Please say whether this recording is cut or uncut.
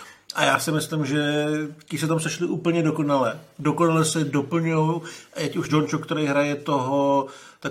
cut